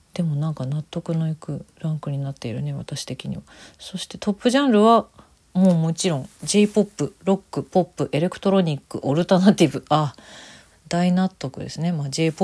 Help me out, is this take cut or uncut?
uncut